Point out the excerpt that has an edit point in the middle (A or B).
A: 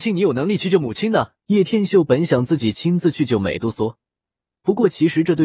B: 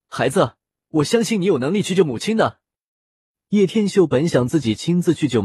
A